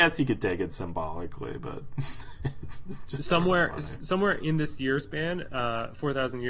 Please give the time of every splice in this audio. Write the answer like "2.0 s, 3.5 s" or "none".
none